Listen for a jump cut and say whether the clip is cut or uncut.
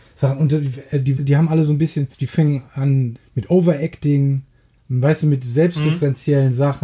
cut